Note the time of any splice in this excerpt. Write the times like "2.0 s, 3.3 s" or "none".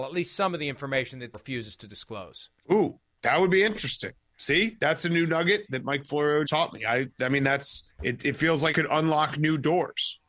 1.3 s, 2.6 s, 6.5 s, 7.9 s, 8.7 s

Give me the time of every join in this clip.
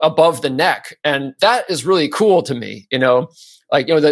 none

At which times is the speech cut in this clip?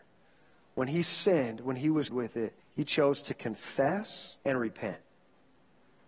2.1 s, 2.6 s, 4.4 s

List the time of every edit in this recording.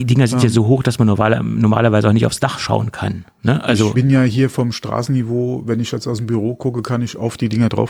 3.9 s

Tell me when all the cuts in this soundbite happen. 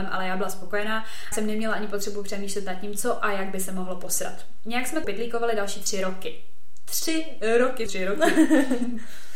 1.3 s, 5.0 s, 7.9 s

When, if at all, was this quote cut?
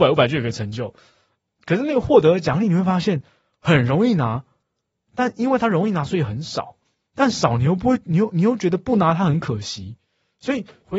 none

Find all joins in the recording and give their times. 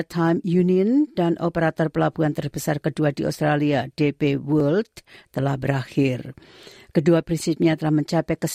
7.2 s

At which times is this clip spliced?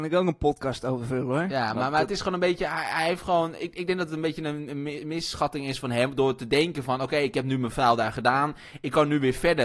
none

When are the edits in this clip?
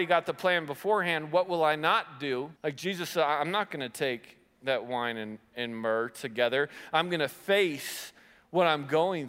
2.6 s

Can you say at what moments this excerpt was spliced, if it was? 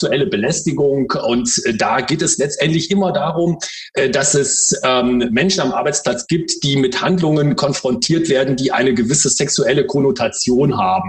none

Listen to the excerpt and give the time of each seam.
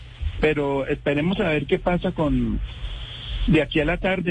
none

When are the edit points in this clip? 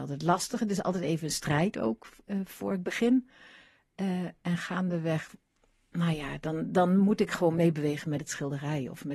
none

